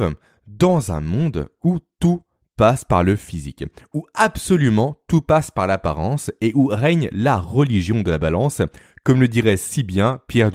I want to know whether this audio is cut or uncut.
uncut